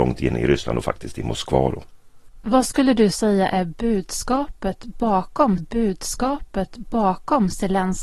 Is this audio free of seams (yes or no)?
no